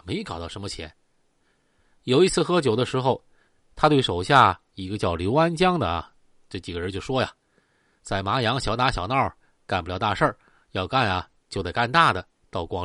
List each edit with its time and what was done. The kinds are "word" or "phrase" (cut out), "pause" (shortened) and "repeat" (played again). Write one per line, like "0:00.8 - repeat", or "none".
none